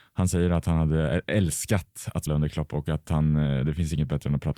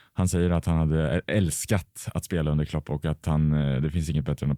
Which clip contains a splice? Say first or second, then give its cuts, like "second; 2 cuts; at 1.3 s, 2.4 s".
first; 1 cut; at 2.3 s